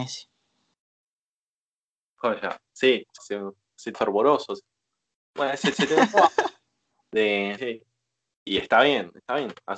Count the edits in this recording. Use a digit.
5